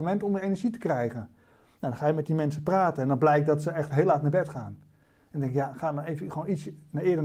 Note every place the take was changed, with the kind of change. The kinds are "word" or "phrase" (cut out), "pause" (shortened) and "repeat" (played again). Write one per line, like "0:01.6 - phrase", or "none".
none